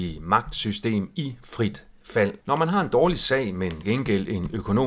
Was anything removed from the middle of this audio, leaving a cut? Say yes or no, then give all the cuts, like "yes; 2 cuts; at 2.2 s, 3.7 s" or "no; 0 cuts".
yes; 2 cuts; at 2.4 s, 3.8 s